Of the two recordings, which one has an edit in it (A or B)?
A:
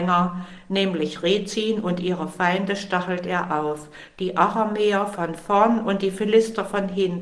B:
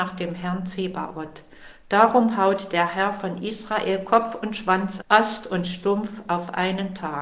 B